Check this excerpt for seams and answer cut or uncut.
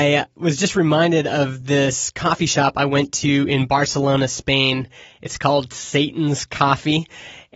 uncut